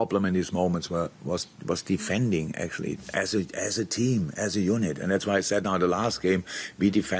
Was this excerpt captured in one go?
yes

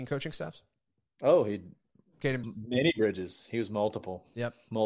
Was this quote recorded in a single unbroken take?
no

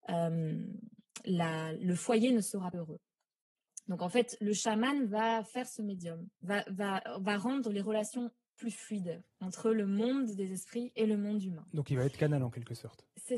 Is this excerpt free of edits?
no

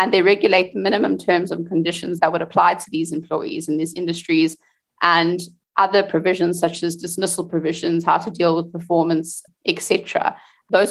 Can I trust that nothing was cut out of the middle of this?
yes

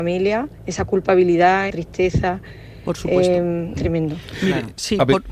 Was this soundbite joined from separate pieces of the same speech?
yes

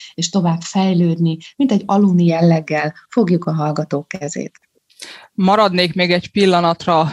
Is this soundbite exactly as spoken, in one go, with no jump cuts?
yes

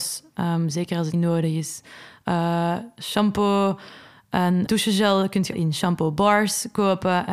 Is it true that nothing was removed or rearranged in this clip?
no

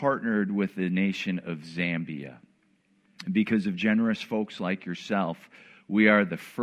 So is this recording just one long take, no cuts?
yes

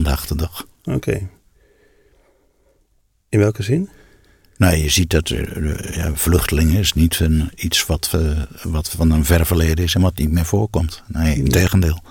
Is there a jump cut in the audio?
no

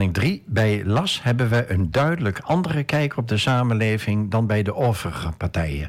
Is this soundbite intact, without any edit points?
yes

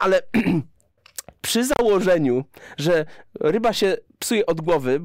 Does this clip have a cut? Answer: no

